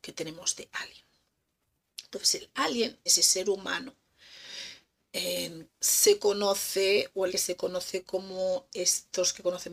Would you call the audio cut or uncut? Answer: cut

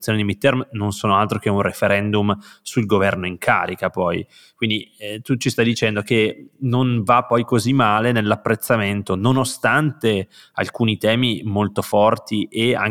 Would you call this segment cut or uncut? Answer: uncut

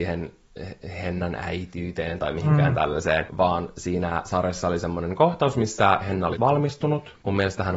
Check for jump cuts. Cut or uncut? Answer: cut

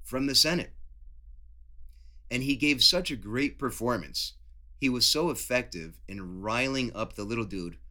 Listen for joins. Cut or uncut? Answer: uncut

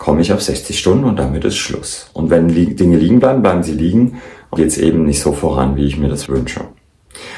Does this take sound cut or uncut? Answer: cut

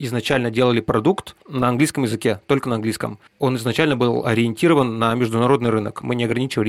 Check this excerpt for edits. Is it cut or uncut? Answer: cut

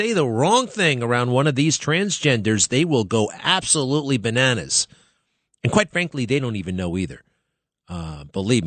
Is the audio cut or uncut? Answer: uncut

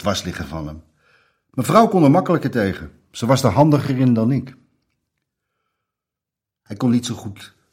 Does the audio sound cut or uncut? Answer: uncut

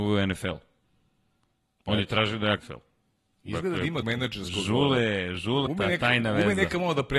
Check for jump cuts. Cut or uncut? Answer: cut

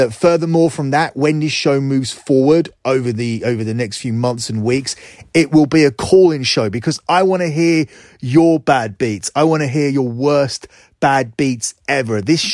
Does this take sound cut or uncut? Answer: uncut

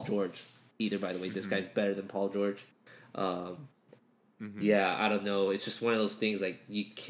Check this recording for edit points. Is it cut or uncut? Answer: uncut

